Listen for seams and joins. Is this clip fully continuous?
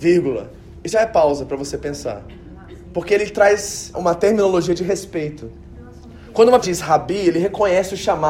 no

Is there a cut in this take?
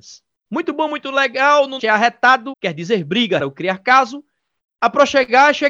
yes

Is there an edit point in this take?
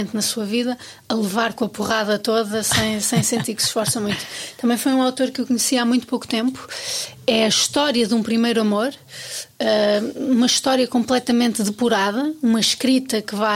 no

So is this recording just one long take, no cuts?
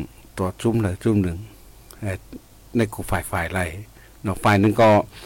yes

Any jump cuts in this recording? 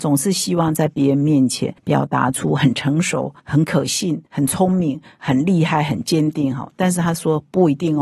yes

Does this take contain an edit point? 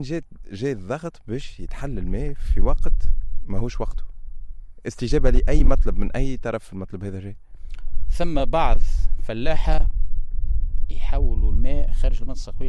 no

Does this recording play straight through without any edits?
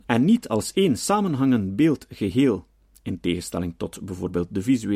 yes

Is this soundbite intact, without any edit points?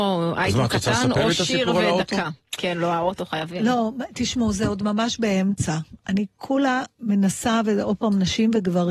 no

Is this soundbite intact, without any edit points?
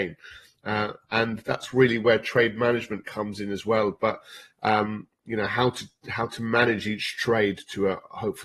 yes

